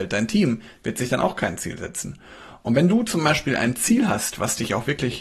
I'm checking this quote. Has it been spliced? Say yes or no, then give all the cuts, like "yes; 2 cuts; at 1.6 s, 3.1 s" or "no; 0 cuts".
no; 0 cuts